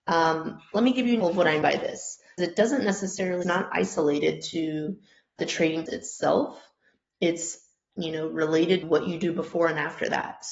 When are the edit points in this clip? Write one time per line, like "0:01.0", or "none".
0:01.2
0:01.6
0:02.4
0:03.4
0:05.4
0:05.9
0:07.9
0:08.8

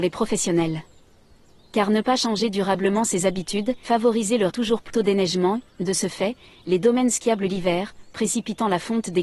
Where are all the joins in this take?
0:03.8
0:04.5
0:04.9

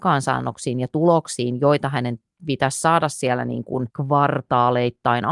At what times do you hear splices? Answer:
0:03.9

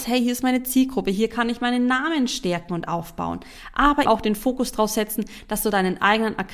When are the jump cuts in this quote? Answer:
0:04.1

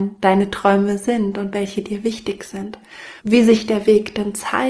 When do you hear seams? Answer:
0:03.2

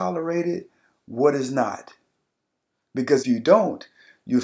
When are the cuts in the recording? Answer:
0:03.2

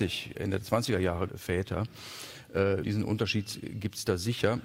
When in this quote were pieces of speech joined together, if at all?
0:01.3
0:02.8

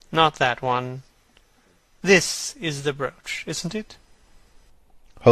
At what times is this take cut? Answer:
none

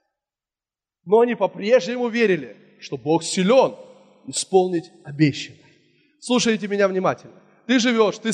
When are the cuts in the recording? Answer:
none

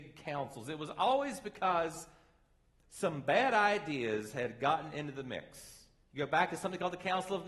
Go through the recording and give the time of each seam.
none

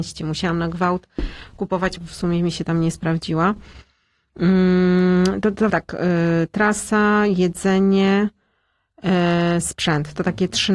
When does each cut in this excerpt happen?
0:02.0
0:05.7

